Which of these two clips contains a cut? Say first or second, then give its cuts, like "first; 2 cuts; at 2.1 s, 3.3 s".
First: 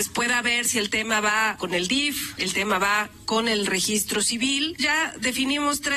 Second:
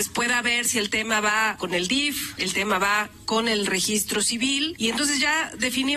first; 1 cut; at 4.8 s